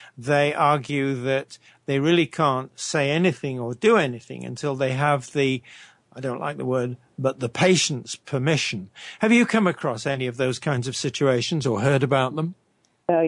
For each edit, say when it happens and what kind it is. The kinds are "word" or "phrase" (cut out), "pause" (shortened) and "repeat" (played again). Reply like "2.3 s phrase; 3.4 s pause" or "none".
none